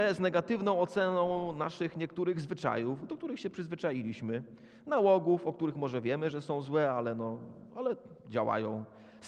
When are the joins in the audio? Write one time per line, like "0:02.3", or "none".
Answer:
0:08.2